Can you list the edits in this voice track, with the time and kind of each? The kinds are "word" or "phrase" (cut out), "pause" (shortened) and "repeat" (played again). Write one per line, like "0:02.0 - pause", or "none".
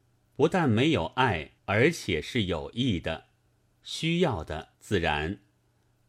0:01.6 - pause
0:04.7 - pause